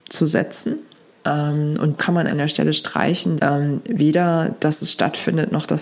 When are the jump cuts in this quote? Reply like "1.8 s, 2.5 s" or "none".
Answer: 2.0 s, 2.3 s, 3.4 s